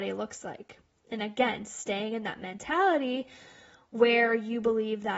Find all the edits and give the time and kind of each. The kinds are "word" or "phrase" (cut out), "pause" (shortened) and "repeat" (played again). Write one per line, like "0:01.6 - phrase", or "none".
none